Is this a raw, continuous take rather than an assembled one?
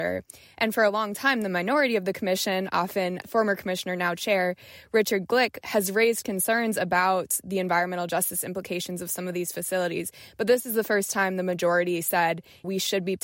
yes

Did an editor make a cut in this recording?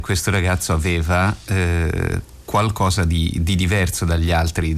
no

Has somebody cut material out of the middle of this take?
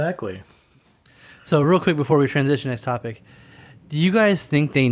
no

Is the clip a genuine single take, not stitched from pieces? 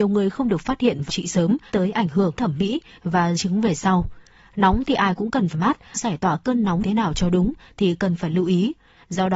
no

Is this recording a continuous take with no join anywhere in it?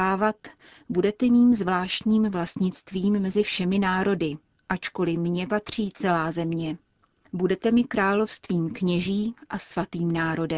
yes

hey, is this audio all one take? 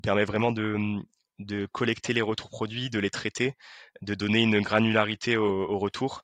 yes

